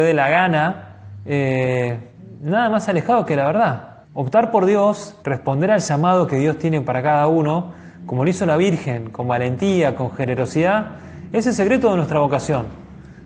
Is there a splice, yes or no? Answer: yes